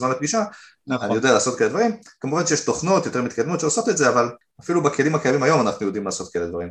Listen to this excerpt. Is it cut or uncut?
uncut